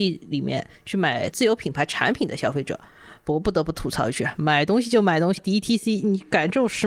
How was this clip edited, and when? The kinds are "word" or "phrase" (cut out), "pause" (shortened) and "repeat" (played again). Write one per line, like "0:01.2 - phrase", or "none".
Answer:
0:01.3 - word
0:05.4 - phrase